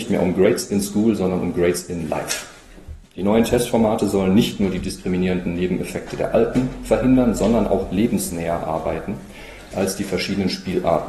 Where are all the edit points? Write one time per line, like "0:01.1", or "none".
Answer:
0:03.0